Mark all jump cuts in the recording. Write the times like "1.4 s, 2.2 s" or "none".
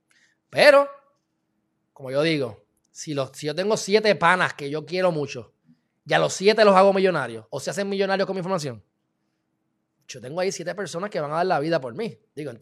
none